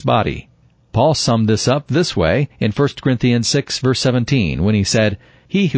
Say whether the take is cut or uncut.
cut